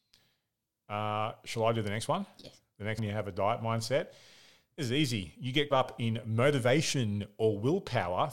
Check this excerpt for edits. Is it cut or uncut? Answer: cut